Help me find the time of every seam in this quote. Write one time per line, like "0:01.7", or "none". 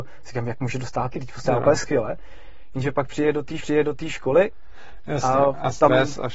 0:01.1
0:01.4
0:03.6